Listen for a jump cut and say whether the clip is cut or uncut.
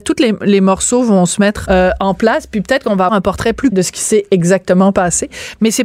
cut